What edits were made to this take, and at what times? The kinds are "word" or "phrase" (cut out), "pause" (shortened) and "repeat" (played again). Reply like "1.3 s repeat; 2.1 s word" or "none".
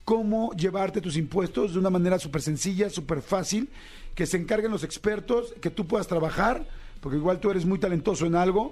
none